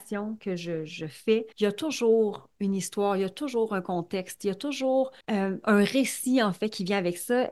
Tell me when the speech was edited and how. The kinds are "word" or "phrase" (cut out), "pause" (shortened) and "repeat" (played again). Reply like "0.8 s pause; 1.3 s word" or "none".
1.5 s pause; 5.2 s pause